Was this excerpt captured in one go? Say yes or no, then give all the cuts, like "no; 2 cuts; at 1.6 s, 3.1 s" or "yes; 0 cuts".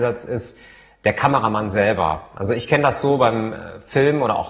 yes; 0 cuts